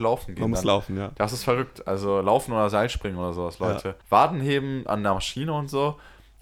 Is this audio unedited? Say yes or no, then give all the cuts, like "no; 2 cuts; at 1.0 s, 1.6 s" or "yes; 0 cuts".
no; 1 cut; at 4.0 s